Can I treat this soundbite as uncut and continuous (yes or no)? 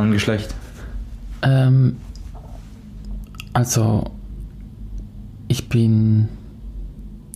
yes